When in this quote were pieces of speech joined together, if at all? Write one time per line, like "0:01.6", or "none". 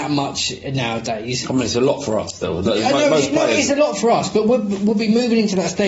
none